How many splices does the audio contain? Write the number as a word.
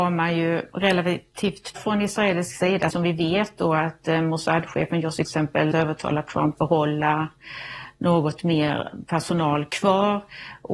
five